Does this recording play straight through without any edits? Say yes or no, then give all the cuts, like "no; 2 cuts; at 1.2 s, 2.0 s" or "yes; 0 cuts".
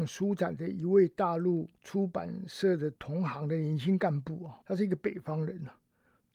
no; 3 cuts; at 1.8 s, 3.0 s, 4.6 s